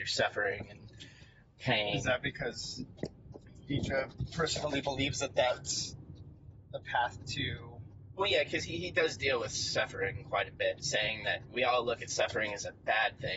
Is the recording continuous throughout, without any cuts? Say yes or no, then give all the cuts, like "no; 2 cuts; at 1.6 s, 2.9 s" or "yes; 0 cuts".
yes; 0 cuts